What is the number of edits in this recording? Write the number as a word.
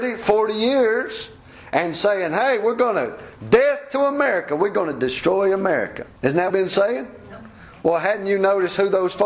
two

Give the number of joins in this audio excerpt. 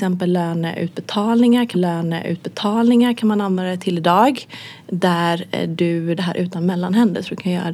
two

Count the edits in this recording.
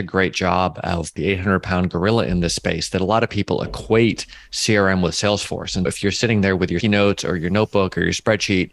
three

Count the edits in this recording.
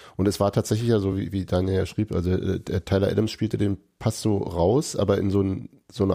zero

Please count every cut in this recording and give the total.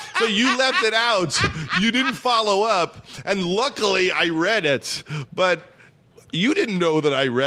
zero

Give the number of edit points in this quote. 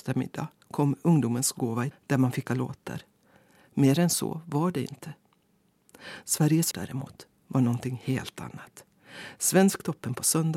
three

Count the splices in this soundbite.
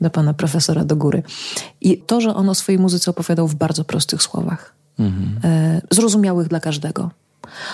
one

